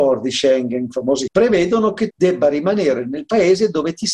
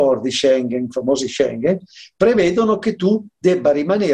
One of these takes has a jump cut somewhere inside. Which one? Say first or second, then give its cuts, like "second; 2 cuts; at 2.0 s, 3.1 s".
first; 2 cuts; at 1.3 s, 2.1 s